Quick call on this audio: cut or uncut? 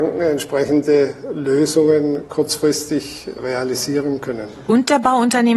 uncut